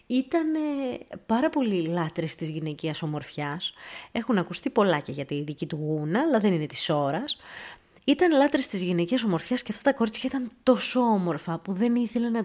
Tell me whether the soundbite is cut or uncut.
uncut